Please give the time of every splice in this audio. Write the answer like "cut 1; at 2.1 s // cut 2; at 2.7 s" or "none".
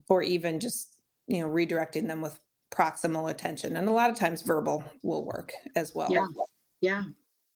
cut 1; at 5.0 s